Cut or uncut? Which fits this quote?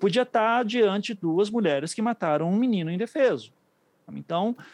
uncut